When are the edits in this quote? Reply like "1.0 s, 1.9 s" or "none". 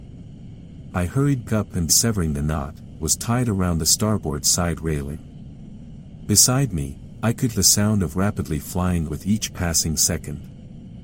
1.4 s, 1.9 s, 3.0 s, 7.5 s, 8.1 s, 9.1 s